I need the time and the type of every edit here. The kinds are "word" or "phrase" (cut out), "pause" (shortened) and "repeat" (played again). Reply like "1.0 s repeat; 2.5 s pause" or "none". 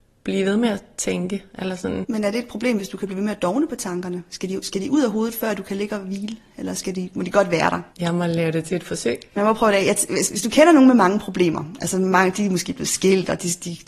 7.9 s pause; 9.3 s pause